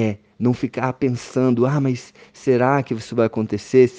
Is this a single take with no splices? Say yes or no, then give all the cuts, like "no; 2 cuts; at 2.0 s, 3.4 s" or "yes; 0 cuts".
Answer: yes; 0 cuts